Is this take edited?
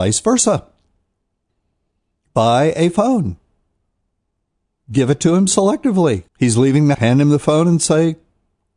yes; 2 cuts; at 6.3 s, 6.9 s

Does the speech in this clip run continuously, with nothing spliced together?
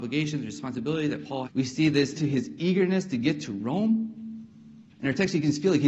no; 2 cuts; at 1.5 s, 2.2 s

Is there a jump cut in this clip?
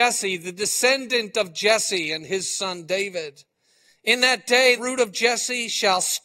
yes; 1 cut; at 4.8 s

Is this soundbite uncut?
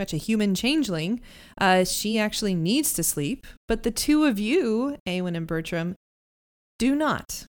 yes; 0 cuts

